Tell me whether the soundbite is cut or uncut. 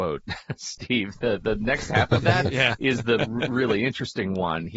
uncut